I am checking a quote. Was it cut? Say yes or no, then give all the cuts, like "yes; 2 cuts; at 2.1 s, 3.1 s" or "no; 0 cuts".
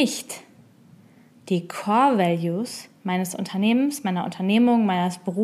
no; 0 cuts